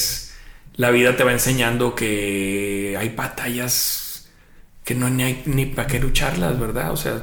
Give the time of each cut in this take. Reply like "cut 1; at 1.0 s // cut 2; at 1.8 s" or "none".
none